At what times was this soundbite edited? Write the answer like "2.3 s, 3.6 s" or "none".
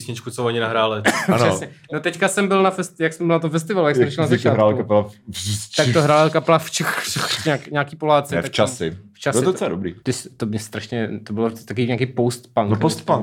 10.0 s